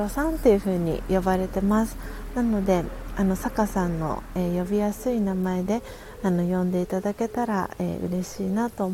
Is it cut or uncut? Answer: uncut